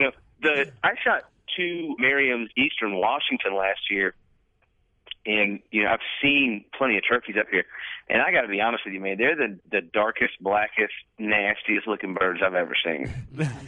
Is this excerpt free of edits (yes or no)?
no